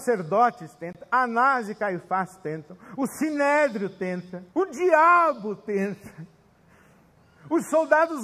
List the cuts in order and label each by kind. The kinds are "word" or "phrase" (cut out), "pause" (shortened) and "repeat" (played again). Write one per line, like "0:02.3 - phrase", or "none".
0:04.5 - pause